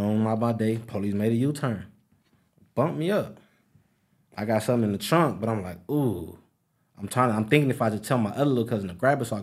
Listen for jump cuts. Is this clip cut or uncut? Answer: uncut